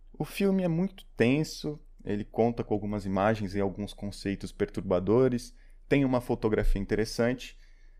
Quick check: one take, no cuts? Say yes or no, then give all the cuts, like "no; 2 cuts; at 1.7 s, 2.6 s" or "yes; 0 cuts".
yes; 0 cuts